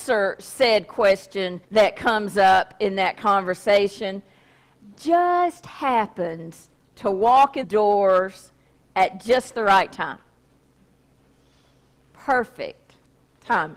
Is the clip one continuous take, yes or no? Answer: no